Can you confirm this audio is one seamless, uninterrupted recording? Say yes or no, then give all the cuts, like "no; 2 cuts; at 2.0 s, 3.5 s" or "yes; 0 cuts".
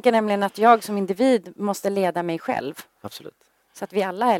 yes; 0 cuts